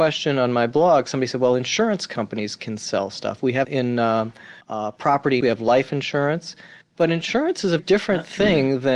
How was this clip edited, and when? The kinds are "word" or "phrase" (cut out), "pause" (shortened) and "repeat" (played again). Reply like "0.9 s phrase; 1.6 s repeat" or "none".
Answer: 3.6 s word; 4.6 s pause; 5.4 s phrase; 6.8 s pause; 7.8 s word